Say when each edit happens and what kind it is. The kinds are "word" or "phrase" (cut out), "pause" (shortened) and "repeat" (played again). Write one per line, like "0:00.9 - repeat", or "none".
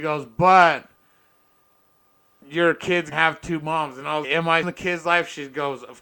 0:03.1 - word
0:04.2 - word
0:04.6 - word